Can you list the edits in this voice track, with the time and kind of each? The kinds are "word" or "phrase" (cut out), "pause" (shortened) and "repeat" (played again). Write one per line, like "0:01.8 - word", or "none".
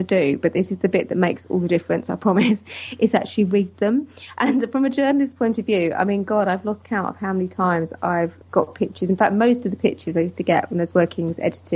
0:08.4 - pause